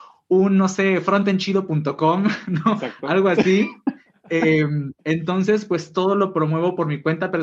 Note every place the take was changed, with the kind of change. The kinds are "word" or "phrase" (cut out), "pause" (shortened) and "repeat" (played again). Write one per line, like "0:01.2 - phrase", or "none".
0:05.0 - pause